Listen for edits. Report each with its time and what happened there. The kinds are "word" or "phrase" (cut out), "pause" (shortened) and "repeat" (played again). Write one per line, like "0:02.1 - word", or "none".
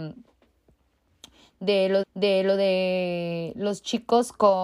0:02.0 - repeat